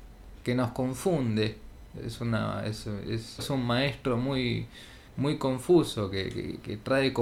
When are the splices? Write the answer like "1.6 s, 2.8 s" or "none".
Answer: 3.4 s, 5.1 s

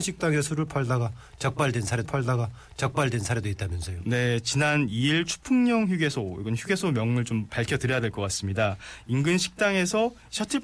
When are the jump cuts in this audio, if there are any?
2.0 s

